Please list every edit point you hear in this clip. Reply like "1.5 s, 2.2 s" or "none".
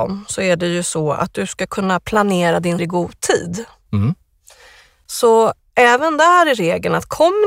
2.8 s